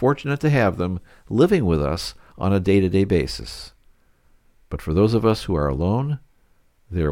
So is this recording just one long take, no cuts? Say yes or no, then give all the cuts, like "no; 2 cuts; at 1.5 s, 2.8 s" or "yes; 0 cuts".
yes; 0 cuts